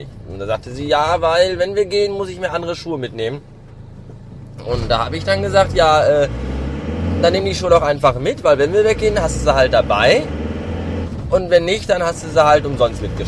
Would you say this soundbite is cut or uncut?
uncut